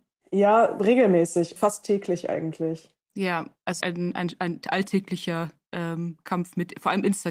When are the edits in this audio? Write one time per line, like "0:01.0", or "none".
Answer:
0:01.6
0:03.0
0:03.8